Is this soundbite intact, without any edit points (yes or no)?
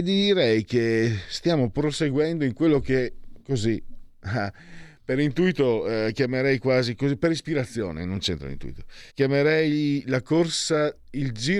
no